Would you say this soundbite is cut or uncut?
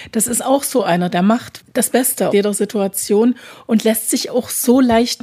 cut